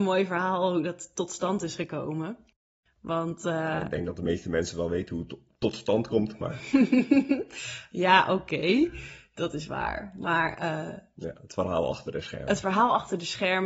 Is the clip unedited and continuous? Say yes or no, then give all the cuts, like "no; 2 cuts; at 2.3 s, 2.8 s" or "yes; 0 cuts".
yes; 0 cuts